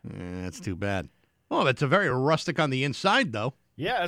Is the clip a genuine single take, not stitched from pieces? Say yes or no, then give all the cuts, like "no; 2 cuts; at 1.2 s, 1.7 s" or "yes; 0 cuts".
yes; 0 cuts